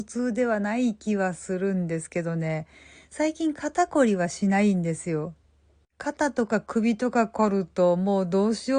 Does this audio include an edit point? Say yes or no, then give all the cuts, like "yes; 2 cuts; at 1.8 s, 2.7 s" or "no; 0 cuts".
no; 0 cuts